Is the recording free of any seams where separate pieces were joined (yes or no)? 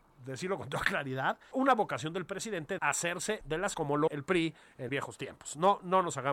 no